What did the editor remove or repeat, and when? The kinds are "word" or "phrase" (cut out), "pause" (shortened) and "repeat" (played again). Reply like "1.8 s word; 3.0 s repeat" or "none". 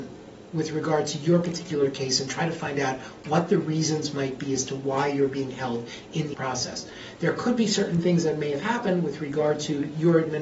6.3 s word